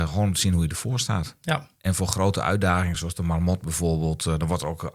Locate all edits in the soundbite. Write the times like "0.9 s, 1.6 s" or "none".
none